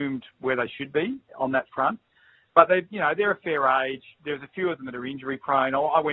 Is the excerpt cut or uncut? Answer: uncut